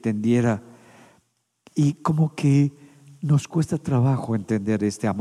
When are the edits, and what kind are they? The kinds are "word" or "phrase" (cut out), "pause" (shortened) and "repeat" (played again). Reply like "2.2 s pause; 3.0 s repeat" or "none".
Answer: none